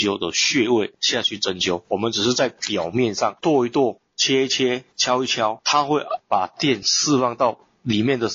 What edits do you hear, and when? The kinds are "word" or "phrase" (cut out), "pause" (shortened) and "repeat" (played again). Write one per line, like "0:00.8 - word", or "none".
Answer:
0:04.9 - pause

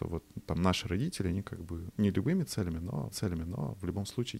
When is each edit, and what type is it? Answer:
0:01.9 - word
0:03.1 - repeat

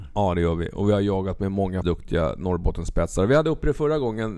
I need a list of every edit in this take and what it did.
0:01.8 - word

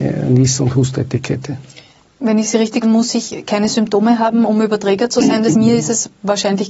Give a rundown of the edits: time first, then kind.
0:02.8 - word
0:05.5 - word

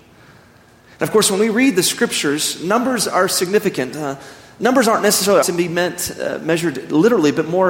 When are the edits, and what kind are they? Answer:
0:05.4 - word

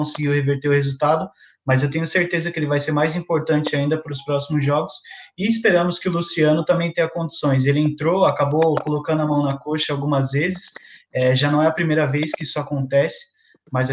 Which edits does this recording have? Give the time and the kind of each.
none

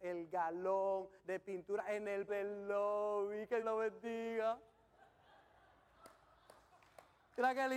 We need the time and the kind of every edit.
0:01.2 - pause
0:02.3 - word
0:03.6 - word

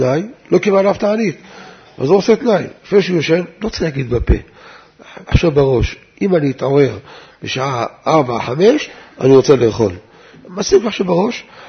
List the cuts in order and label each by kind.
none

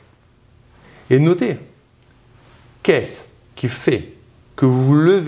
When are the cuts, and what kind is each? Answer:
none

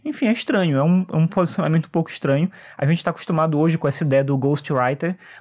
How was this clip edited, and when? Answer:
none

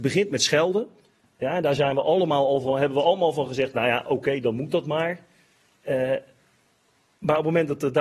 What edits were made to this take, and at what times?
none

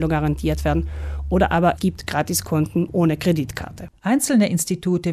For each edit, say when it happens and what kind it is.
0:01.8 - word
0:02.9 - word
0:04.0 - pause

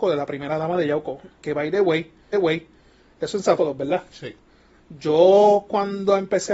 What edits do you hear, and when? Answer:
0:02.3 - repeat
0:03.6 - word

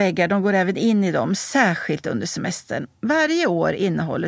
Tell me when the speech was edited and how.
none

